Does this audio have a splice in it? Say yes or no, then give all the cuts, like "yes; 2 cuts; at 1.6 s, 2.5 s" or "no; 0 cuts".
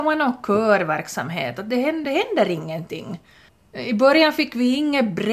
yes; 2 cuts; at 2.0 s, 3.5 s